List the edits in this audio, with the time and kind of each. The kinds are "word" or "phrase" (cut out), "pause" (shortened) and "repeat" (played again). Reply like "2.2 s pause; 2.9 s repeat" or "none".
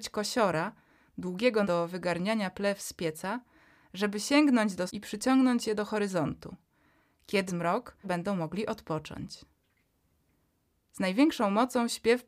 1.6 s word; 4.9 s word; 7.5 s word; 8.0 s word